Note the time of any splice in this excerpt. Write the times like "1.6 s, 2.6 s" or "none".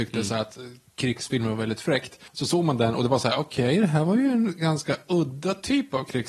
2.3 s